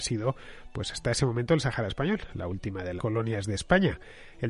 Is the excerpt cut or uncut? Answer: cut